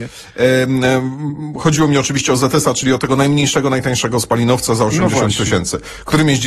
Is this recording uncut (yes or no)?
yes